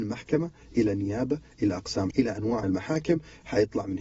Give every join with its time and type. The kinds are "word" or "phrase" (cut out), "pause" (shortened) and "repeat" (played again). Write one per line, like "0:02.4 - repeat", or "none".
0:02.1 - word
0:02.6 - word